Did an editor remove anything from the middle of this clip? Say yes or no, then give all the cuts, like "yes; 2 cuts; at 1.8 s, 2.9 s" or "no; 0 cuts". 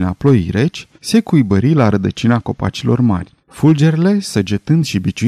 yes; 2 cuts; at 1.0 s, 3.4 s